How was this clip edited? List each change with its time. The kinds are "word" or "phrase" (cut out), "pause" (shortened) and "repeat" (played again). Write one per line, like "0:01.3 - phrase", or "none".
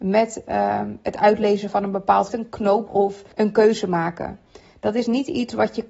0:02.3 - phrase
0:02.9 - word
0:03.3 - pause